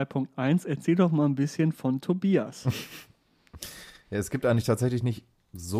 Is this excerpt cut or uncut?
uncut